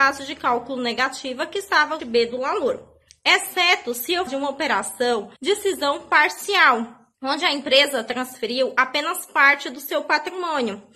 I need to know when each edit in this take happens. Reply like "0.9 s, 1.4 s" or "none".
2.0 s, 3.1 s, 4.3 s, 5.4 s, 7.1 s